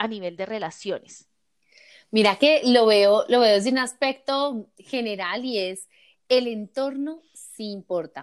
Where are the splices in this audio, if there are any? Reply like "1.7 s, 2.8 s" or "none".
none